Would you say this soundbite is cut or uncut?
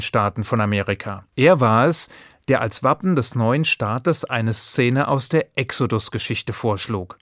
cut